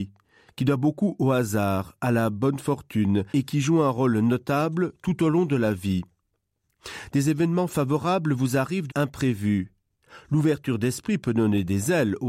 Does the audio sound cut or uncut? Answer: cut